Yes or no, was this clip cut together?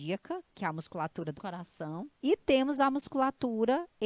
yes